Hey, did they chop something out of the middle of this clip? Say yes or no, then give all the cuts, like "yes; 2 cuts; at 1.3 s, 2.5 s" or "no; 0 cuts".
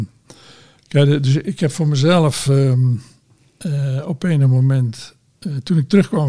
no; 0 cuts